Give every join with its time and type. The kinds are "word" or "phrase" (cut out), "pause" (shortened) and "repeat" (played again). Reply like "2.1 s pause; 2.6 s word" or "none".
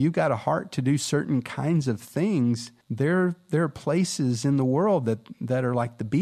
2.8 s pause